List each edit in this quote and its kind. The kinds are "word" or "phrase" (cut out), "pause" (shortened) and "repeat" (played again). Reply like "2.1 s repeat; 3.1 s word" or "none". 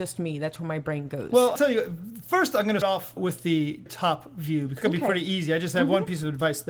1.6 s word; 2.8 s word; 3.2 s word; 3.9 s word; 4.8 s word